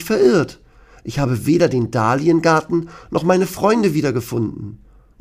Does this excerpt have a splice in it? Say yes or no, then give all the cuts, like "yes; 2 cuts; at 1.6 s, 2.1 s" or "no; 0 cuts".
no; 0 cuts